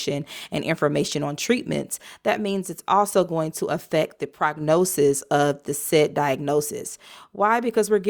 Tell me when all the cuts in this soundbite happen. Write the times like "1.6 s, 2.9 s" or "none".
none